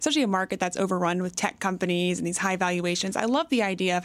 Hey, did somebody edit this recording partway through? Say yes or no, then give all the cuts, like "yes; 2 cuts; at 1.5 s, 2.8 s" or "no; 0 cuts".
no; 0 cuts